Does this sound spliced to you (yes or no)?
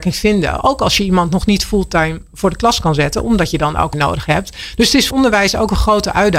yes